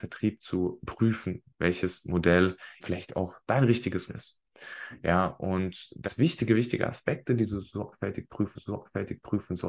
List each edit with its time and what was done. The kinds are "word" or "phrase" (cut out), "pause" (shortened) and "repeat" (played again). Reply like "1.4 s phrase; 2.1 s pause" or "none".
2.8 s word; 3.4 s pause; 4.1 s word; 6.1 s word; 8.6 s repeat